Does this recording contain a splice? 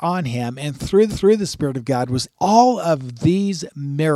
yes; 2 cuts; at 1.1 s, 2.3 s

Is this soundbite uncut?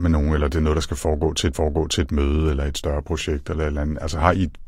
no; 1 cut; at 1.5 s

